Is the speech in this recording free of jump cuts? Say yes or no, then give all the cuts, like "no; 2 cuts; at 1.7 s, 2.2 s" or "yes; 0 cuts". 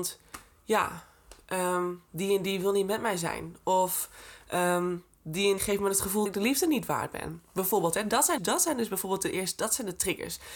no; 3 cuts; at 5.6 s, 6.3 s, 8.4 s